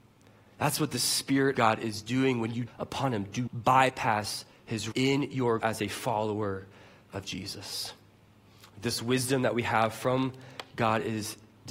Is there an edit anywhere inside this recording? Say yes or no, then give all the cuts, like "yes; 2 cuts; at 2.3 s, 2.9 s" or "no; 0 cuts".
yes; 5 cuts; at 1.5 s, 2.7 s, 3.5 s, 4.9 s, 5.6 s